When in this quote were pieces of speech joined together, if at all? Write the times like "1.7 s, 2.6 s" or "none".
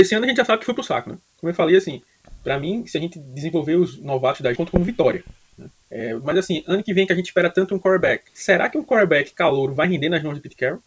4.6 s, 5.8 s, 8.3 s